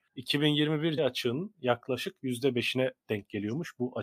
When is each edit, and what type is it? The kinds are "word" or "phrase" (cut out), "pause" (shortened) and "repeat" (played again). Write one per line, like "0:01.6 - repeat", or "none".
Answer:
0:01.0 - word